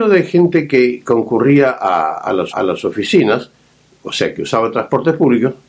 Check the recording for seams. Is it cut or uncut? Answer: cut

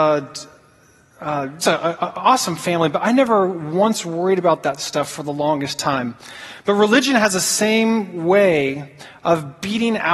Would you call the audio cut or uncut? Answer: cut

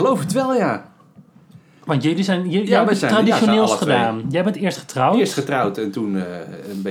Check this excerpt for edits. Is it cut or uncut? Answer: uncut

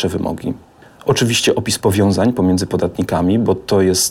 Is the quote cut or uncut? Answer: uncut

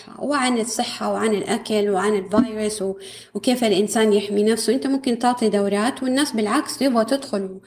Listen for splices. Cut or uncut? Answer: uncut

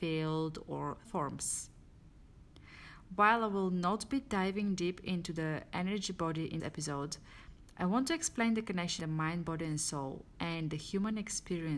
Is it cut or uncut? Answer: cut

